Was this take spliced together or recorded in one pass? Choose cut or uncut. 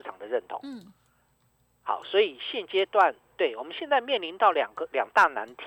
uncut